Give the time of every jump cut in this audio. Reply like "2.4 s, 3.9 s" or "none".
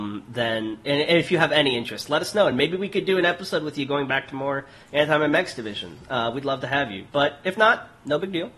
none

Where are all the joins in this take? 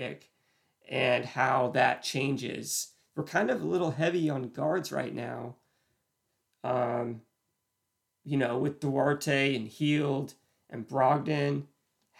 none

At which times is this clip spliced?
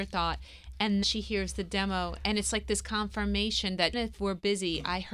1.0 s, 3.9 s

